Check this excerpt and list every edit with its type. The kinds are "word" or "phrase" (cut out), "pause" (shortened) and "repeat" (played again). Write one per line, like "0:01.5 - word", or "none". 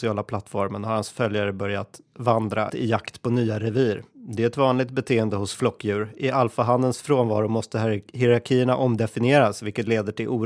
0:02.7 - phrase